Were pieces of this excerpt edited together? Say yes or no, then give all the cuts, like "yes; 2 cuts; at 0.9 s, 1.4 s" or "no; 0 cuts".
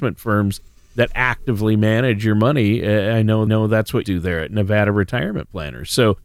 yes; 2 cuts; at 3.5 s, 4.0 s